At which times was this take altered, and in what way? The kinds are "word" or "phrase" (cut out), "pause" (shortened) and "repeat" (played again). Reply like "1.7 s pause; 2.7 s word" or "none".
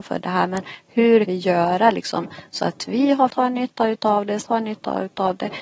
1.3 s word; 3.3 s word; 4.4 s word